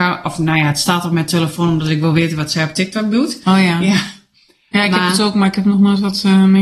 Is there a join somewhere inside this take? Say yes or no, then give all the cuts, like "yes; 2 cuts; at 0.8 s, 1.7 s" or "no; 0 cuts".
no; 0 cuts